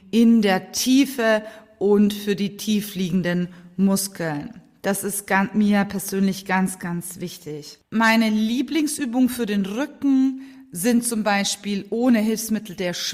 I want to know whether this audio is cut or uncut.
uncut